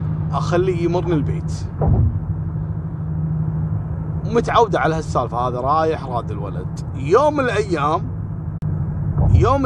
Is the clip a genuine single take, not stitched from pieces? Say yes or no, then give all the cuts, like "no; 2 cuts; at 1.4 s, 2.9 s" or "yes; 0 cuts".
yes; 0 cuts